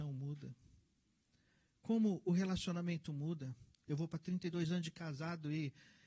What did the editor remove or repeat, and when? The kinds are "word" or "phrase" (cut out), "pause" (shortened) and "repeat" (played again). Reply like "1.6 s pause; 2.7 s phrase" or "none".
none